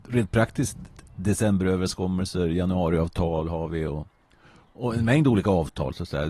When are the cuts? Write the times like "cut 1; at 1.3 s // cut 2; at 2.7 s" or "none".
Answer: none

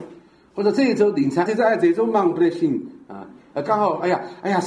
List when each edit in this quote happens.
cut 1; at 1.5 s

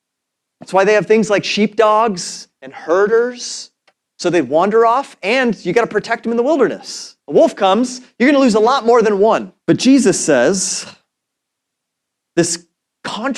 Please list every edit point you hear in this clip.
cut 1; at 3.9 s // cut 2; at 7.2 s // cut 3; at 9.6 s

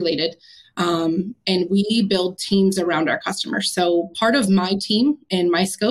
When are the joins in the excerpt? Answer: none

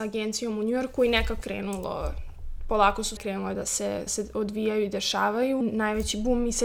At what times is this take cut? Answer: cut 1; at 1.4 s // cut 2; at 3.2 s // cut 3; at 4.1 s // cut 4; at 5.6 s

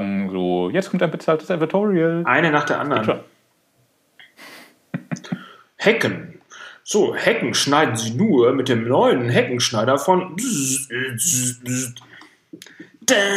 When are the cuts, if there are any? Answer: none

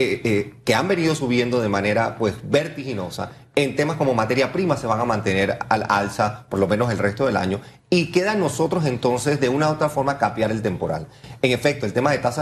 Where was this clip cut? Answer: none

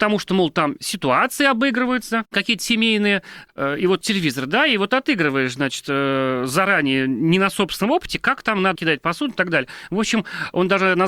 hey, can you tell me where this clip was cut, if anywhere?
cut 1; at 4.0 s // cut 2; at 8.8 s

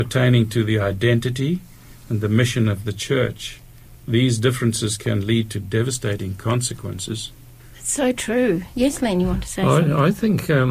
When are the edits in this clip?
none

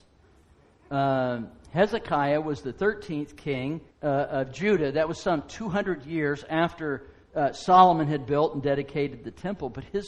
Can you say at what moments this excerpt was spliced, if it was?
cut 1; at 3.9 s

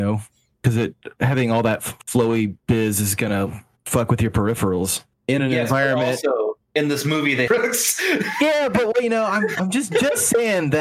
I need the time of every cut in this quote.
cut 1; at 3.8 s // cut 2; at 5.1 s // cut 3; at 6.6 s // cut 4; at 7.5 s

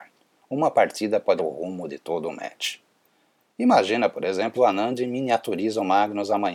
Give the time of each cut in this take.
cut 1; at 1.4 s // cut 2; at 4.5 s

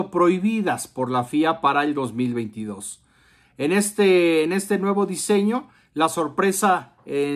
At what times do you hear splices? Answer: none

